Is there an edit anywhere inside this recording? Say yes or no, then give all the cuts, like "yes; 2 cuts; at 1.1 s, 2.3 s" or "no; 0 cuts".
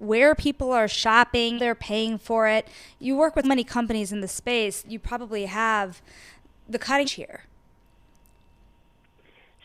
yes; 4 cuts; at 1.6 s, 3.4 s, 4.8 s, 7.0 s